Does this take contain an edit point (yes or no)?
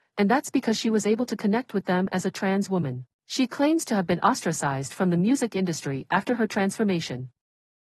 yes